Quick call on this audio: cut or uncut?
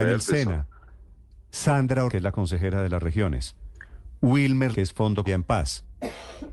cut